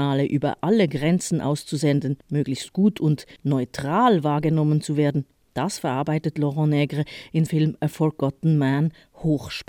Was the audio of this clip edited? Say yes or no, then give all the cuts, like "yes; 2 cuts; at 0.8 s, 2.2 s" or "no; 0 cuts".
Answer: yes; 3 cuts; at 2.2 s, 3.4 s, 7.5 s